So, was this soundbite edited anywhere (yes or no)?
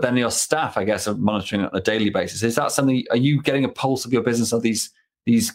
no